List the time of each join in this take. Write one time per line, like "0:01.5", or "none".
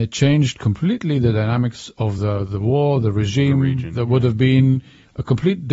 none